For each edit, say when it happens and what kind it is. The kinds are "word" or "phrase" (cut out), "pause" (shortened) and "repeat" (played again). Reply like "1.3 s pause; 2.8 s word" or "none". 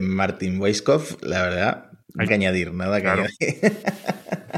2.3 s word